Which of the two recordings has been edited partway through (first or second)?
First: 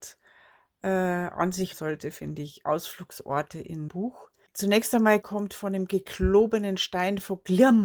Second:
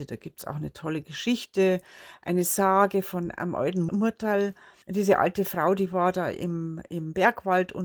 first